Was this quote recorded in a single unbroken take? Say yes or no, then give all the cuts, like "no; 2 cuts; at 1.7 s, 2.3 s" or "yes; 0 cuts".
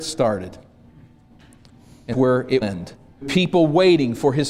no; 3 cuts; at 2.1 s, 2.6 s, 3.2 s